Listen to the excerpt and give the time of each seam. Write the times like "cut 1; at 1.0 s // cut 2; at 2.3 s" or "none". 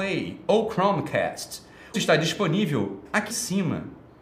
cut 1; at 1.9 s // cut 2; at 3.3 s